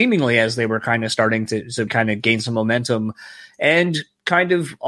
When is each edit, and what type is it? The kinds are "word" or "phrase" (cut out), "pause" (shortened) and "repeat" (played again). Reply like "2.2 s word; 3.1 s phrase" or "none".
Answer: 1.9 s word